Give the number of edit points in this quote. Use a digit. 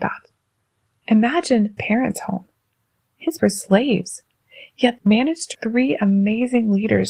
4